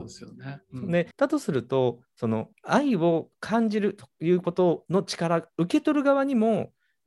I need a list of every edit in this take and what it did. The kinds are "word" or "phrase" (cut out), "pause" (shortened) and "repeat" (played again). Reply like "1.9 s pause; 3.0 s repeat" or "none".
1.1 s pause; 2.5 s pause